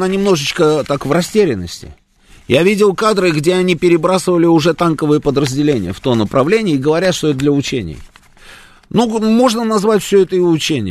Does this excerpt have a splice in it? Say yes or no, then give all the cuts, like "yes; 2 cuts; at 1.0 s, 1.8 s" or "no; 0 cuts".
no; 0 cuts